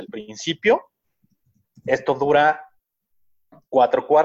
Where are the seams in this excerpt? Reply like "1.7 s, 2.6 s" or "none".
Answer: none